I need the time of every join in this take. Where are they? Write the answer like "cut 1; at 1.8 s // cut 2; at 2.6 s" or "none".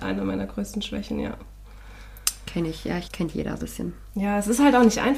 cut 1; at 3.1 s // cut 2; at 3.6 s

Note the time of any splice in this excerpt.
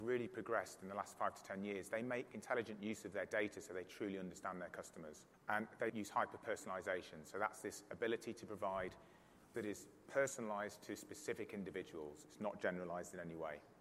cut 1; at 5.3 s // cut 2; at 5.9 s // cut 3; at 9.5 s

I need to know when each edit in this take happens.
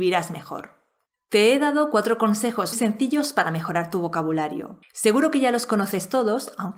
cut 1; at 2.7 s // cut 2; at 4.8 s

